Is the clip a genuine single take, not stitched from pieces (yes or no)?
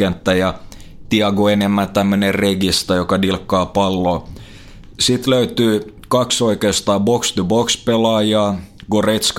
yes